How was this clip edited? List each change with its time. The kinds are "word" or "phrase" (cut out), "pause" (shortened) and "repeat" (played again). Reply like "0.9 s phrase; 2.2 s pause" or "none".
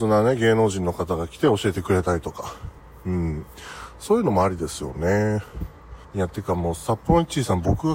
6.0 s pause